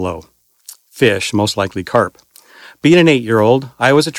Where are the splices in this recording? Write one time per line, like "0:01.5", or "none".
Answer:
none